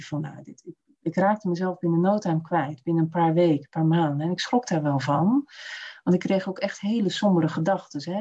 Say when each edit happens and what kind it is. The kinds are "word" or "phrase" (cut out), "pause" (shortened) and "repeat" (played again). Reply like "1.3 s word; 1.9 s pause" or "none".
none